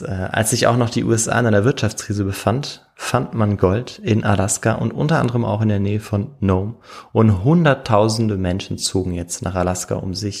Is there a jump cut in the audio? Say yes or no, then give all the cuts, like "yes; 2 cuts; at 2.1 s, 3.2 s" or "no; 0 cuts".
no; 0 cuts